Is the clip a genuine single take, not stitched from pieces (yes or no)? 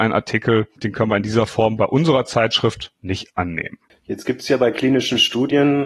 yes